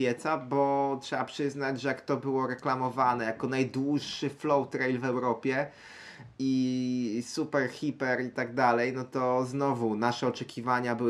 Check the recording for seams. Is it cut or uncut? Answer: uncut